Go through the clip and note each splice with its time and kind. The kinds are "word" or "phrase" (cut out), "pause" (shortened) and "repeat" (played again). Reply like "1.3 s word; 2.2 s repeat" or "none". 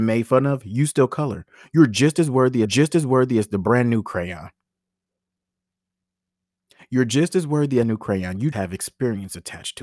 2.6 s repeat; 7.8 s phrase; 8.5 s word